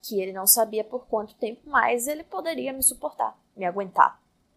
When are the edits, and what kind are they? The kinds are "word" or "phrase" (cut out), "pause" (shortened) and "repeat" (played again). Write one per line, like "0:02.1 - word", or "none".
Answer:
0:03.5 - pause